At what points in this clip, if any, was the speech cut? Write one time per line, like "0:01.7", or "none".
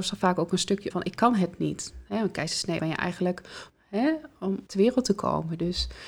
0:00.9
0:02.8
0:03.7
0:04.7